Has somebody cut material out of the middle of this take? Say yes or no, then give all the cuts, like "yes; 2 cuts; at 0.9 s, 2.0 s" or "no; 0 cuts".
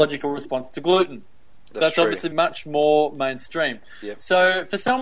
yes; 1 cut; at 2.3 s